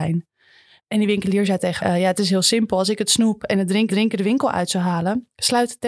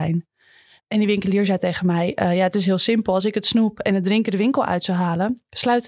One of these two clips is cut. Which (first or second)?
first